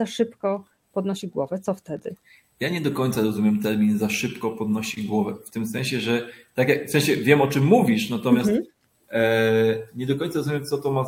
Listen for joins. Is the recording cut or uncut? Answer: uncut